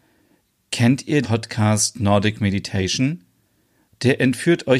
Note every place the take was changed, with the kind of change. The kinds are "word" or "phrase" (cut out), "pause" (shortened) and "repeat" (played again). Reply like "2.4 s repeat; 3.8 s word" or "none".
1.2 s word

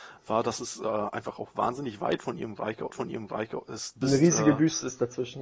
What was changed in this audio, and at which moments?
2.9 s repeat

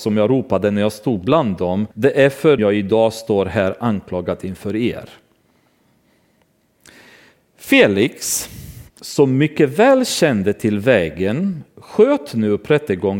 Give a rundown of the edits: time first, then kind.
1.9 s pause; 2.6 s phrase; 8.9 s pause

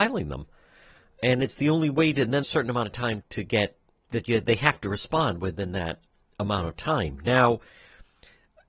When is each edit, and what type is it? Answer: 2.4 s phrase; 3.2 s word; 4.1 s word

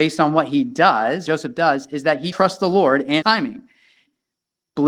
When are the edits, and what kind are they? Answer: 1.3 s word; 2.3 s word; 3.2 s word

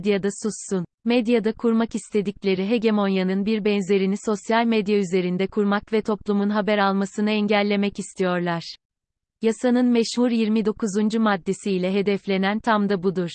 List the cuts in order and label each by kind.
none

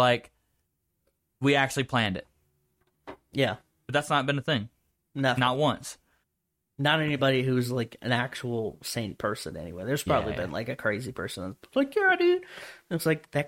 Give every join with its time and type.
none

